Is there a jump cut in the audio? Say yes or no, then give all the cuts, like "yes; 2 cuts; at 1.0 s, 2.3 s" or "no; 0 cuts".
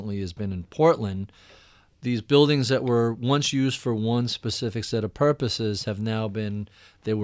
no; 0 cuts